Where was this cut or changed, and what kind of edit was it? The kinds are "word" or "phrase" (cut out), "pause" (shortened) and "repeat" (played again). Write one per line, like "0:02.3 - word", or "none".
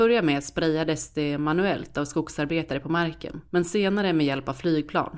0:03.5 - pause